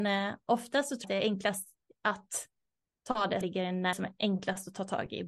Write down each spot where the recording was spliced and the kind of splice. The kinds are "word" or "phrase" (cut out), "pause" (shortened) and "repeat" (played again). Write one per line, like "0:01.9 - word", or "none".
0:01.0 - word
0:03.4 - word
0:03.9 - word